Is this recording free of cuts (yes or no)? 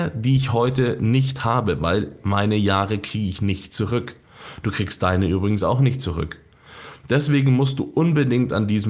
yes